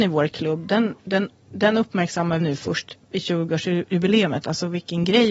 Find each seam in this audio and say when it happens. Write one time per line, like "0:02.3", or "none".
0:01.0
0:02.4
0:03.0